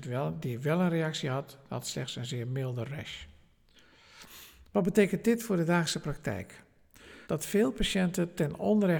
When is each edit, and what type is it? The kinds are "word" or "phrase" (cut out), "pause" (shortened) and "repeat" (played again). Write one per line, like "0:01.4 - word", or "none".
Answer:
0:07.2 - pause